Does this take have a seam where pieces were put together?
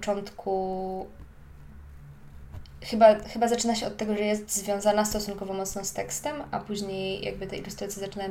no; 0 cuts

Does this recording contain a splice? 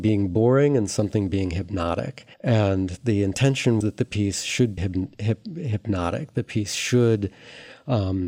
yes; 3 cuts; at 2.3 s, 3.8 s, 4.8 s

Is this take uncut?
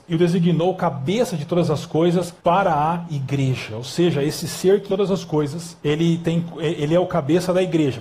no; 3 cuts; at 2.4 s, 4.9 s, 5.8 s

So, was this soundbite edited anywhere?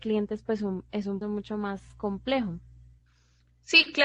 yes; 1 cut; at 1.2 s

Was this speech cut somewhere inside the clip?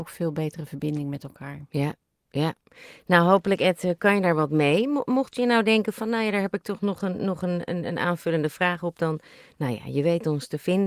no; 0 cuts

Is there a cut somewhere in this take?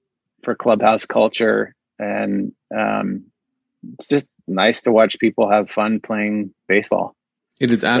no; 0 cuts

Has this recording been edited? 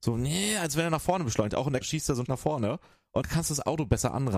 yes; 3 cuts; at 1.8 s, 2.3 s, 3.2 s

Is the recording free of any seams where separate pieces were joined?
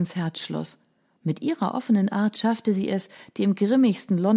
yes; 0 cuts

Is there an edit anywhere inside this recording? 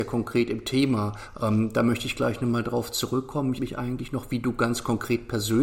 yes; 1 cut; at 3.6 s

